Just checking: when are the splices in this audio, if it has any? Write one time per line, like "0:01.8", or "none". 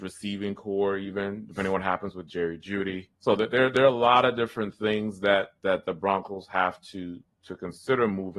0:03.1